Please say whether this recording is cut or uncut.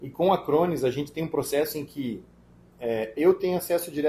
uncut